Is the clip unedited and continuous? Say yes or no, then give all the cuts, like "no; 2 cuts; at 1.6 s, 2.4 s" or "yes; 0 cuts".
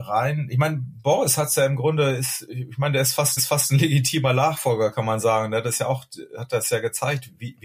no; 1 cut; at 3.4 s